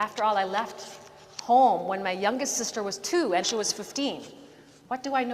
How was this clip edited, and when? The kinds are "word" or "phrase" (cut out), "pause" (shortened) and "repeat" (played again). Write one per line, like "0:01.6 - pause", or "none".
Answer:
0:03.4 - word